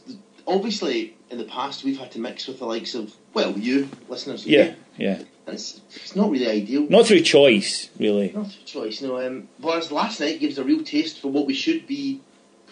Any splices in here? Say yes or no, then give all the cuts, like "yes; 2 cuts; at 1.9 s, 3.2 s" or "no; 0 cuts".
no; 0 cuts